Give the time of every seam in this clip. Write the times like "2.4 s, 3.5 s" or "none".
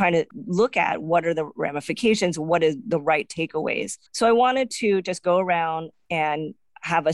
4.1 s